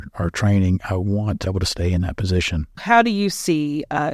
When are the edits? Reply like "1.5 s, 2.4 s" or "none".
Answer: 1.5 s, 2.8 s